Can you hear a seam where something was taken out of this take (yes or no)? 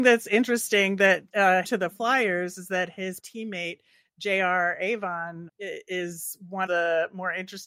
yes